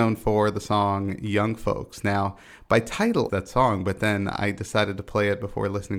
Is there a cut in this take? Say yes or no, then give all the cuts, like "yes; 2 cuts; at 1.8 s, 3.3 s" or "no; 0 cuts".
yes; 1 cut; at 3.3 s